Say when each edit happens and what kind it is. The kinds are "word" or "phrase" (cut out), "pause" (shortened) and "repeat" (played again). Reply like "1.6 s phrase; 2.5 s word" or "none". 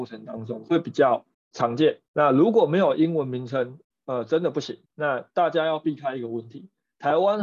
1.3 s pause; 2.1 s pause; 3.8 s pause; 4.9 s pause